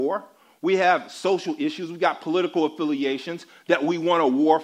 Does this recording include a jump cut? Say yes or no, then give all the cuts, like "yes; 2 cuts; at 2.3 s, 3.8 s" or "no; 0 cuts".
no; 0 cuts